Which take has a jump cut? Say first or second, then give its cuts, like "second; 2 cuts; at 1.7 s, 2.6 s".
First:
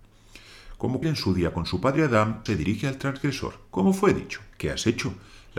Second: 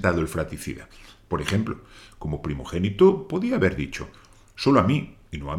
first; 4 cuts; at 1.0 s, 2.5 s, 3.7 s, 4.5 s